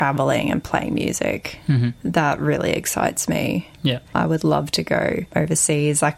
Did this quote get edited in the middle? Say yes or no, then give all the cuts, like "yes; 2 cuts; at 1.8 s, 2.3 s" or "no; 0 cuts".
no; 0 cuts